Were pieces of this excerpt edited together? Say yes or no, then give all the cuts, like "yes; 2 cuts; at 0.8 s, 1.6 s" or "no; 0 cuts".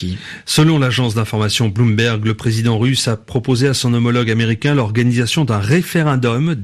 no; 0 cuts